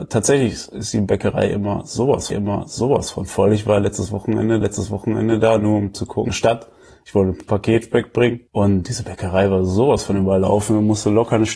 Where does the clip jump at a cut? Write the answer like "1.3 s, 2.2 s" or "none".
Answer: 2.3 s, 4.6 s, 6.3 s, 8.5 s